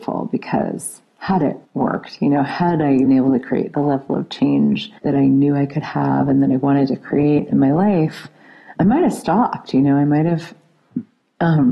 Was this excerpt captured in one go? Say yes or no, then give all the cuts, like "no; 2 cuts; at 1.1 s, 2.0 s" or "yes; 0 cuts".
no; 4 cuts; at 1.6 s, 3.1 s, 5.0 s, 8.8 s